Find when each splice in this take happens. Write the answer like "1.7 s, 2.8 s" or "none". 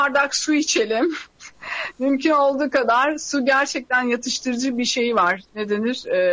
none